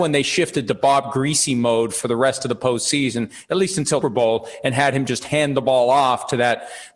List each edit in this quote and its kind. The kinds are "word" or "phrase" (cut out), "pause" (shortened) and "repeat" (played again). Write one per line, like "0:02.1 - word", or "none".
0:04.0 - phrase